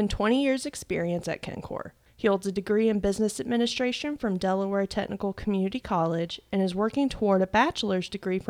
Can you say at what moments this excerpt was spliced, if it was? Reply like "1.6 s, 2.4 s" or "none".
none